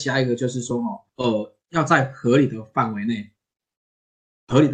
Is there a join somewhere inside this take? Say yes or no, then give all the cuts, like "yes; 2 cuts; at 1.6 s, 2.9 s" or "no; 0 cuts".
yes; 1 cut; at 1.1 s